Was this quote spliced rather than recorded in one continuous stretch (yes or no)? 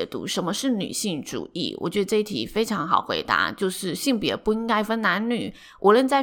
no